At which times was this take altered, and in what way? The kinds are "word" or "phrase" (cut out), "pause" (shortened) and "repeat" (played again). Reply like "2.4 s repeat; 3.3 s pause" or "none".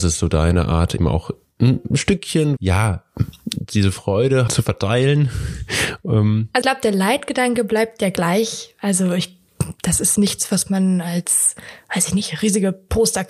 1.0 s word; 1.9 s word; 2.6 s word; 4.5 s word; 6.6 s word; 10.2 s word